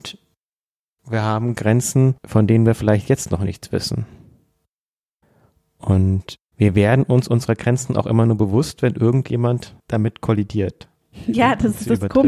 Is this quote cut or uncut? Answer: cut